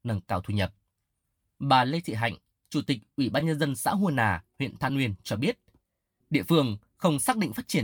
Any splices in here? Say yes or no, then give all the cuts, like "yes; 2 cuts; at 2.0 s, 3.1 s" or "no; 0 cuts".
no; 0 cuts